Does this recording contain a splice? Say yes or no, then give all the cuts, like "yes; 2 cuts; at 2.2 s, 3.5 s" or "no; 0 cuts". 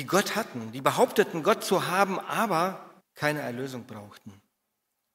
yes; 1 cut; at 3.0 s